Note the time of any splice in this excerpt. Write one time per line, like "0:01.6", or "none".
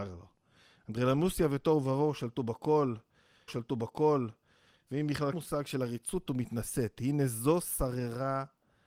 0:03.5
0:05.3
0:06.3